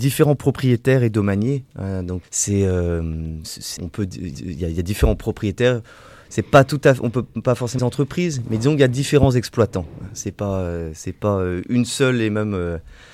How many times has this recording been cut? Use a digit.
4